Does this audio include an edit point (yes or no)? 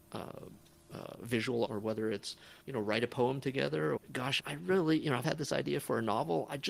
yes